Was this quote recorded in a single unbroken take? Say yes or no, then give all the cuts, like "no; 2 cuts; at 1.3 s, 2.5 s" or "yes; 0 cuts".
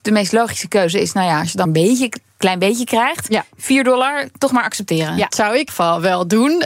no; 3 cuts; at 1.7 s, 5.3 s, 5.7 s